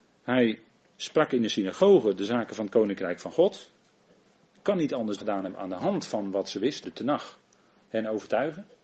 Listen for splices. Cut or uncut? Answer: cut